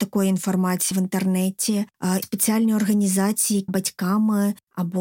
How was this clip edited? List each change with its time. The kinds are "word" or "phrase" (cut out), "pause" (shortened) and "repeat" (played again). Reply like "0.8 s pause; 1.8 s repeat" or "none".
0.9 s word; 2.2 s word; 3.7 s word